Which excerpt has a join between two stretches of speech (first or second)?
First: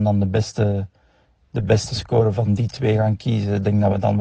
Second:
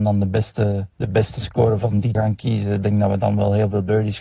second